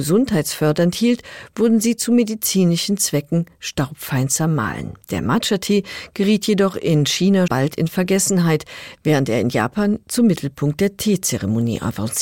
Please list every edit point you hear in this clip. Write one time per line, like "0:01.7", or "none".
0:05.0
0:07.5